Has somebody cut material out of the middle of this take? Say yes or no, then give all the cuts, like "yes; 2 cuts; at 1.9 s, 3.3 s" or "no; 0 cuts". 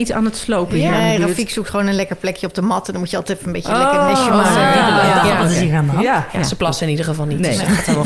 no; 0 cuts